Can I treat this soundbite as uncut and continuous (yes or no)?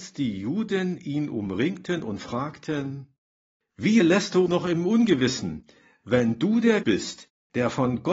no